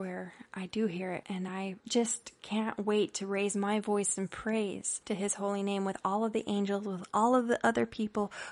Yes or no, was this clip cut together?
no